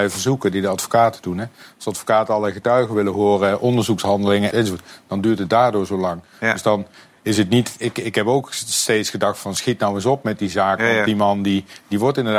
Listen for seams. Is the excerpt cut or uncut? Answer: cut